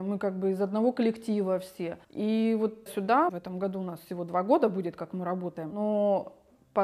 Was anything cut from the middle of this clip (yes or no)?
yes